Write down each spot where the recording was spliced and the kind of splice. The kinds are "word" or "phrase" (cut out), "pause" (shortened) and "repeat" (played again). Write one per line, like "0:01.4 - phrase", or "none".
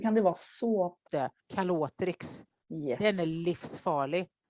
0:01.1 - phrase